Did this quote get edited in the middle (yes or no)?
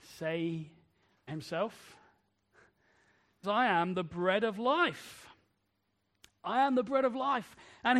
yes